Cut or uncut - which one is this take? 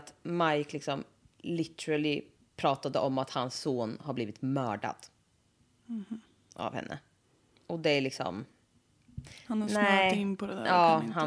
uncut